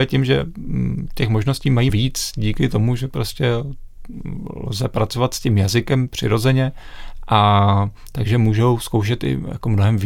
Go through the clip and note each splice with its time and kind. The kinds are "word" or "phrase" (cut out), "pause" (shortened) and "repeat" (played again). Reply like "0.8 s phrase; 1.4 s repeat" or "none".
1.9 s word